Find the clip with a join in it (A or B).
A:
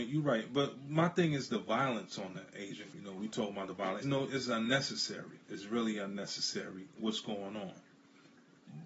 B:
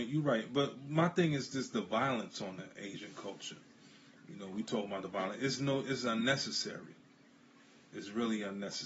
A